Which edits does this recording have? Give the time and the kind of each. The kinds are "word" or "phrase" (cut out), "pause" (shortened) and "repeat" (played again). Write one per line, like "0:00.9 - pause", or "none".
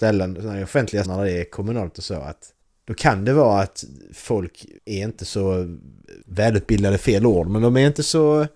0:01.0 - word
0:02.6 - pause
0:04.8 - pause
0:06.2 - pause